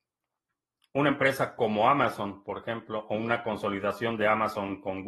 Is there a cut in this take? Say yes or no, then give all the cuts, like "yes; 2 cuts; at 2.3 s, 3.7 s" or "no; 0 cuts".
no; 0 cuts